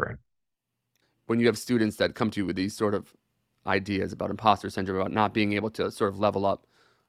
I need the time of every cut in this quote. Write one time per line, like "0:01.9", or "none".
none